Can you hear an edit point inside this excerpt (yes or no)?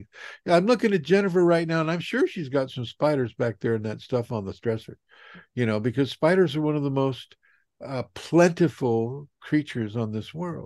no